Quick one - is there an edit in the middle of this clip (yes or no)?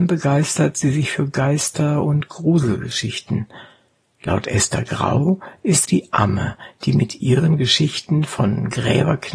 yes